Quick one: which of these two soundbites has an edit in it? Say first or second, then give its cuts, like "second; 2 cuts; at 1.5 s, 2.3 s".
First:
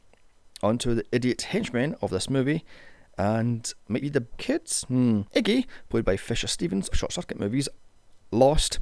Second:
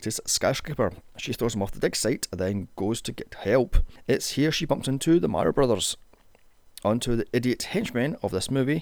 first; 3 cuts; at 4.0 s, 4.3 s, 6.9 s